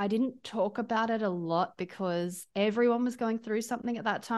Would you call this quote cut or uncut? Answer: uncut